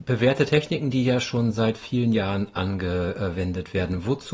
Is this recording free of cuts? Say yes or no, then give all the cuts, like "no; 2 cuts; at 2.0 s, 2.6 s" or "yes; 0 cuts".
yes; 0 cuts